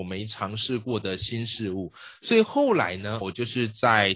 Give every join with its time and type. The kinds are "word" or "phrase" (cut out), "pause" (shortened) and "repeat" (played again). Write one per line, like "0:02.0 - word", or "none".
0:03.2 - word